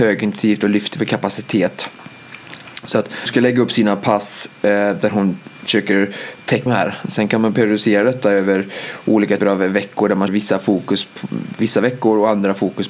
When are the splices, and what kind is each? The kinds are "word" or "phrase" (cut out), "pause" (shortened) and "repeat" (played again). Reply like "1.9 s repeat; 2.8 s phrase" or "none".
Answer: 3.3 s word; 5.5 s pause; 6.7 s phrase; 9.4 s word; 10.3 s word

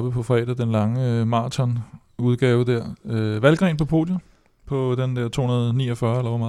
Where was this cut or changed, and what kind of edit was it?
none

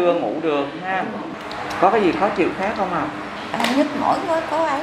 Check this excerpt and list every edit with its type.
none

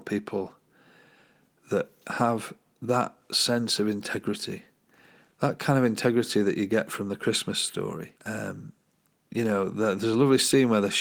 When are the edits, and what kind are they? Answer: 8.2 s pause

